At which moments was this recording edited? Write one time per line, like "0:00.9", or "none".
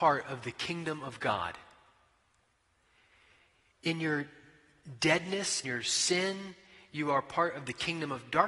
0:05.6